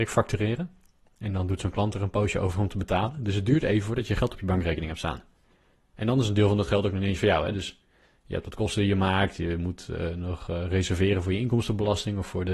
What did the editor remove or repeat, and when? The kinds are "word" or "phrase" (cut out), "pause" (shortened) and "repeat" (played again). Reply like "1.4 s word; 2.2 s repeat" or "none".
none